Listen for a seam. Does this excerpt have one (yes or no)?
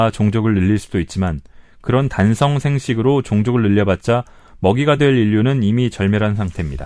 no